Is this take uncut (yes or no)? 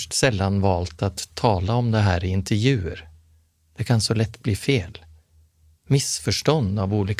yes